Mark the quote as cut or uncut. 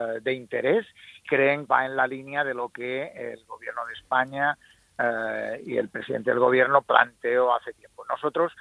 cut